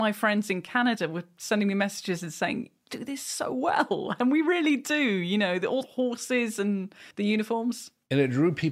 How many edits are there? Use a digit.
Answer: 2